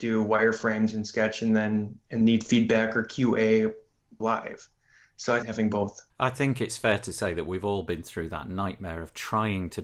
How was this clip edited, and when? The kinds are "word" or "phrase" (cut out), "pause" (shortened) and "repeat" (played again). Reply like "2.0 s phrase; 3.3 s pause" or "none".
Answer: 2.2 s word; 4.2 s phrase; 5.4 s phrase; 6.1 s pause